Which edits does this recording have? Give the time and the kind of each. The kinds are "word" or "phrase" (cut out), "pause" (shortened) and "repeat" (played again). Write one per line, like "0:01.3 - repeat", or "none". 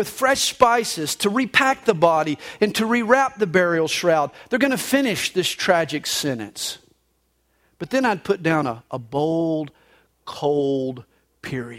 none